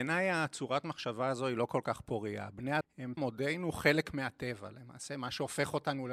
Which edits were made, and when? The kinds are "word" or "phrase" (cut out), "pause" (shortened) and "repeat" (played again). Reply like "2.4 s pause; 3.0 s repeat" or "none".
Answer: 2.8 s word; 3.2 s phrase